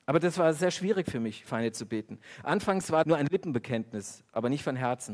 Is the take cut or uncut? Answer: cut